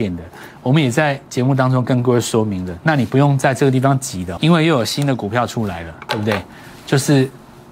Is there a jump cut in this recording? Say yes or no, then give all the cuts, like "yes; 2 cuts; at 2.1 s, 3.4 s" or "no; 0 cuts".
yes; 1 cut; at 4.4 s